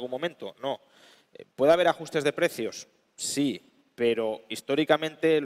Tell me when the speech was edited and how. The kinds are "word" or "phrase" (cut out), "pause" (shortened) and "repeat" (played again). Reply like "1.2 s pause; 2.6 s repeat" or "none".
none

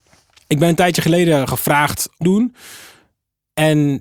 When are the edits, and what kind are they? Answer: 2.2 s phrase

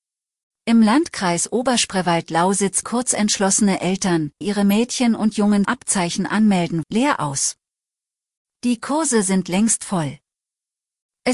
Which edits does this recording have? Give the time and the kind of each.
2.8 s word; 4.4 s word; 5.6 s word; 6.8 s word

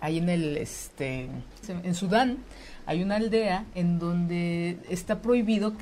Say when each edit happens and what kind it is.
1.6 s word

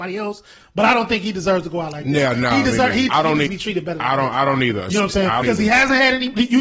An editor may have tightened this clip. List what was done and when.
3.1 s word; 3.5 s word; 5.4 s word

